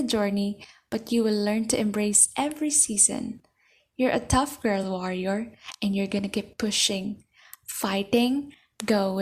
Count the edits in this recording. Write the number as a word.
zero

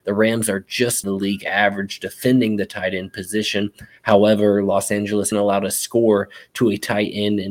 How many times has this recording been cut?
two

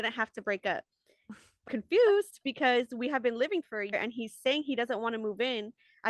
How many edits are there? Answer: four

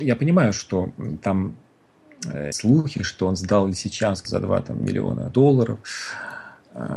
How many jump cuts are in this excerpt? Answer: three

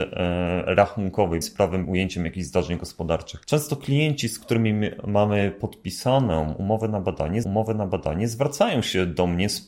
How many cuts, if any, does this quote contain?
three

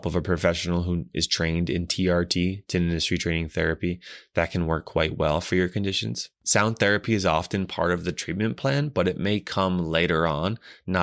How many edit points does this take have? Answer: zero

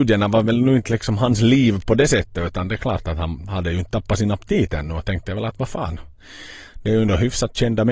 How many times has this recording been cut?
zero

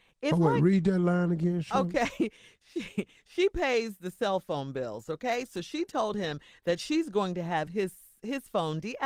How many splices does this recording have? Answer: zero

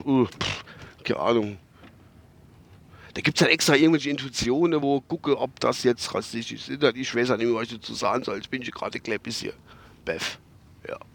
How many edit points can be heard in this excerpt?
zero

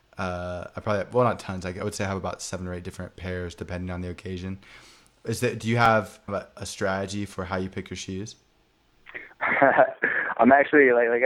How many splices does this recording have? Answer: one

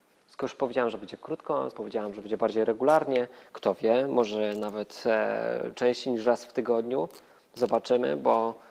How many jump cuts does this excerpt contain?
one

